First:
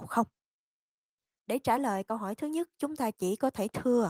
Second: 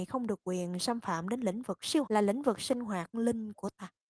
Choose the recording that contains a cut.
second; 2 cuts; at 2.1 s, 3.1 s

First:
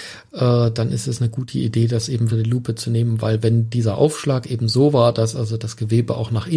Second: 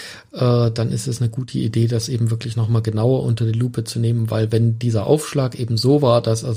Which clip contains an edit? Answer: first; 1 cut; at 2.3 s

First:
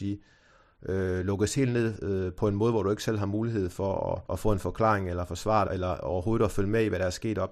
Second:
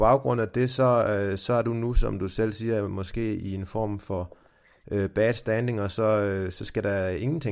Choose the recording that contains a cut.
first; 2 cuts; at 4.3 s, 5.7 s

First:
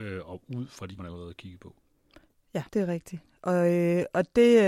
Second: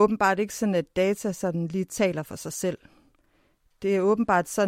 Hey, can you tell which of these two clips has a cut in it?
first; 2 cuts; at 1.0 s, 2.7 s

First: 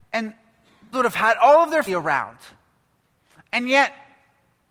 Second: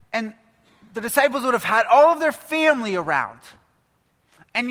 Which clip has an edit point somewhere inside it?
first; 2 cuts; at 0.9 s, 1.9 s

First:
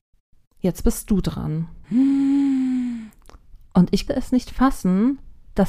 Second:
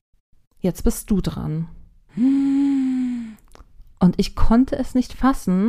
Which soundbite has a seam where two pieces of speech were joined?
first; 2 cuts; at 1.8 s, 4.1 s

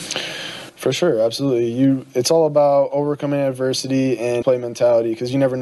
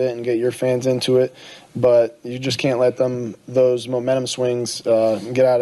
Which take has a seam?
first; 1 cut; at 4.4 s

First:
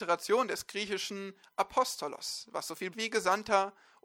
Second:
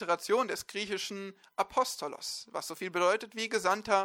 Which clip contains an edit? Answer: first; 1 cut; at 2.9 s

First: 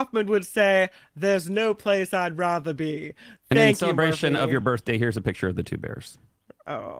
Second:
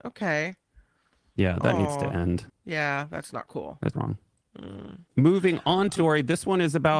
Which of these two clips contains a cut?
second; 4 cuts; at 2.5 s, 3.9 s, 5.1 s, 6.0 s

